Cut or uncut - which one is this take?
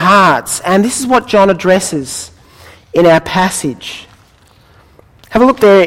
uncut